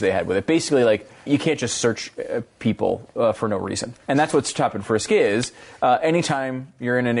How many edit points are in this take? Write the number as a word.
two